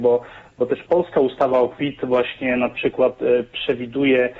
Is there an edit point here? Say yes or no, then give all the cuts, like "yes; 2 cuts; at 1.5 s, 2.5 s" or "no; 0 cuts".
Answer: no; 0 cuts